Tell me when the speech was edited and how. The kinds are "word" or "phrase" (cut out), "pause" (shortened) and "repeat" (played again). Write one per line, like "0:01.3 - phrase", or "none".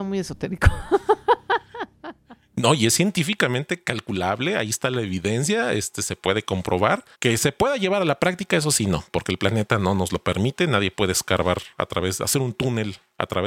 0:07.1 - pause